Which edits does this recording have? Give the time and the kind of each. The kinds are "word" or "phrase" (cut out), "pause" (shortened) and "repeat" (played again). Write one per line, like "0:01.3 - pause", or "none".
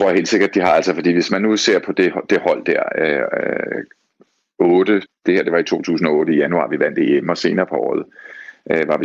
0:05.1 - word